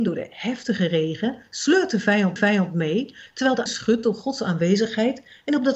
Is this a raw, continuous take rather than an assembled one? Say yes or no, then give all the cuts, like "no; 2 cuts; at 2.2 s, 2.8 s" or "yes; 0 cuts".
no; 2 cuts; at 2.4 s, 3.7 s